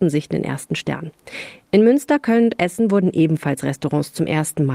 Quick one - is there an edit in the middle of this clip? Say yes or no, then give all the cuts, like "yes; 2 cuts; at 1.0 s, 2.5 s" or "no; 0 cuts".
no; 0 cuts